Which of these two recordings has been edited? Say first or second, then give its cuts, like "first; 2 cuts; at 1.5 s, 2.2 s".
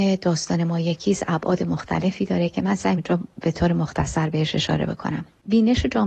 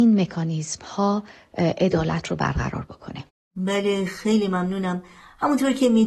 first; 1 cut; at 3.0 s